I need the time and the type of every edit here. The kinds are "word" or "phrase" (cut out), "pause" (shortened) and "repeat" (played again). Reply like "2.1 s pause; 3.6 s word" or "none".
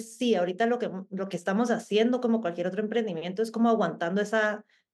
none